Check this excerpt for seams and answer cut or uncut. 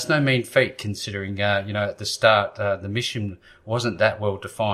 uncut